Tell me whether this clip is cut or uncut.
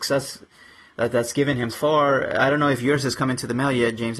cut